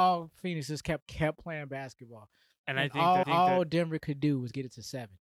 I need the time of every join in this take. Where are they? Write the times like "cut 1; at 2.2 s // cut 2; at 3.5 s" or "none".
cut 1; at 1.0 s // cut 2; at 3.2 s